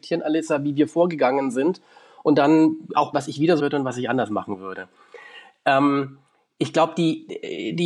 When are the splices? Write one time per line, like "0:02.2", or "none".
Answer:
0:03.1
0:03.6

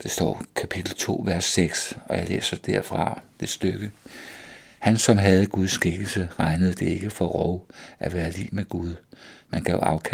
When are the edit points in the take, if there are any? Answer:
none

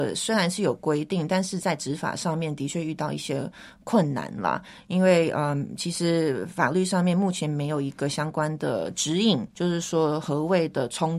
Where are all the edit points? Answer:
0:09.5

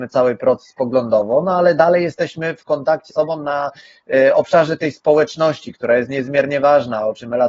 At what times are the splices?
0:03.1

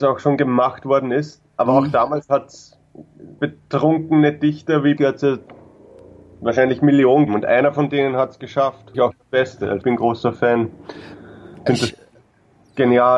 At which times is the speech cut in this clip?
0:03.4
0:05.0
0:07.3
0:08.9
0:09.8
0:11.7

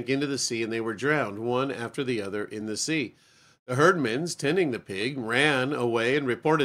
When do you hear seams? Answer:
none

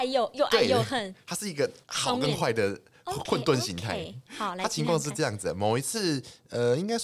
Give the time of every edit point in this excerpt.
0:01.8

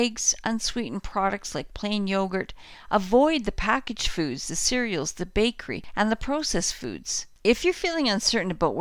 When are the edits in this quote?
none

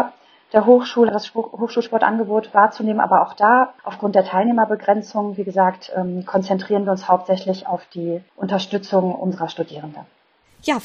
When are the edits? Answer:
0:01.1
0:03.8
0:08.3

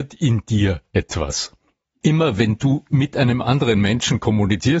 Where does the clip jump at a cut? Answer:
none

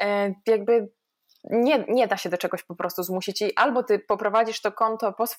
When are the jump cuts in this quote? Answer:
none

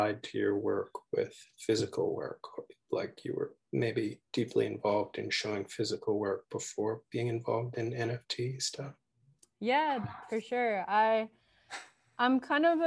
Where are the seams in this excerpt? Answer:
none

